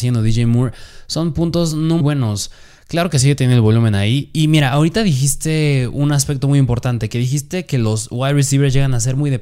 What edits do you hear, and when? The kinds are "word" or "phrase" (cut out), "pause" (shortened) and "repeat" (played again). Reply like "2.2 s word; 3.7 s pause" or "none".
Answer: 2.0 s word